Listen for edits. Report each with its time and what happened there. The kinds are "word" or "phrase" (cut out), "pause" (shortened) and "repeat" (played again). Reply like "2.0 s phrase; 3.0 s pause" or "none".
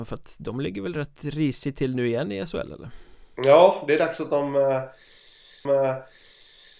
5.6 s repeat